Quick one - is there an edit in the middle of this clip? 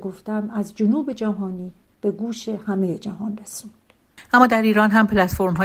no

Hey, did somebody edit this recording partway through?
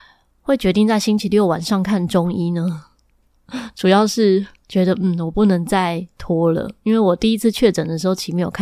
yes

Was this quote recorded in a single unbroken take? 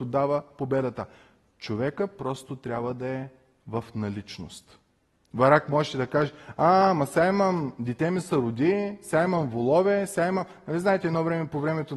yes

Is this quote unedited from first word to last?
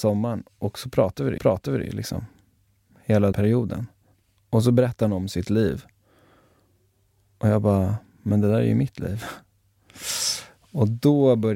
no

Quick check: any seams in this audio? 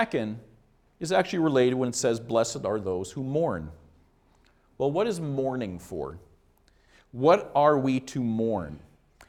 no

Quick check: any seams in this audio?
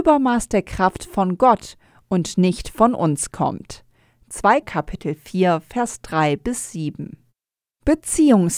yes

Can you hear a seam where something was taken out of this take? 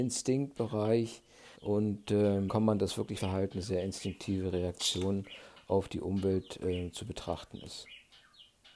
yes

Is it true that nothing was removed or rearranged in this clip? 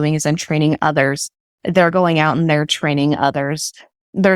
yes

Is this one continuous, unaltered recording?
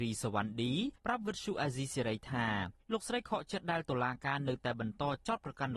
no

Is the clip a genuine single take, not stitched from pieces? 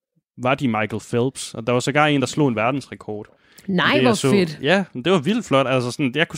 yes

